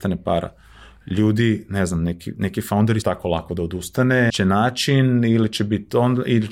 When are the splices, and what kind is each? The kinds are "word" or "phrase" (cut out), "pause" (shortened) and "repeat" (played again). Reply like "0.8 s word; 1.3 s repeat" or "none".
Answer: 3.0 s phrase; 4.3 s word